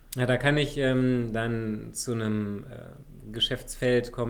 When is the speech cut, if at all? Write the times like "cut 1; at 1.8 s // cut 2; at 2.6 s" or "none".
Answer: none